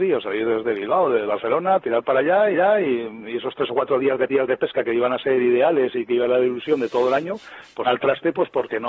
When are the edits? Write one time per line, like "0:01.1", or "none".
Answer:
0:02.5
0:04.3
0:07.8